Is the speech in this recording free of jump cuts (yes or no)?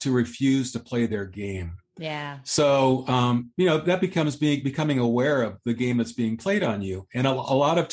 yes